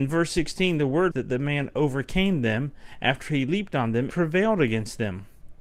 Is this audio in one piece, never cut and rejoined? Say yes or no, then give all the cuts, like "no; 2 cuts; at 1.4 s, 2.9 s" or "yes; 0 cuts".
no; 2 cuts; at 1.1 s, 4.1 s